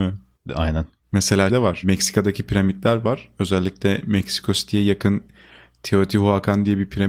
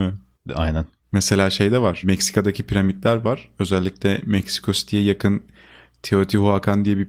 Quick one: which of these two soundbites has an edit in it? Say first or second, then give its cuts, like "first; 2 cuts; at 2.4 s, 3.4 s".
first; 1 cut; at 1.5 s